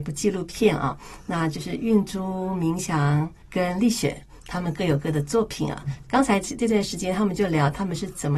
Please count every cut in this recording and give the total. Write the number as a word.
one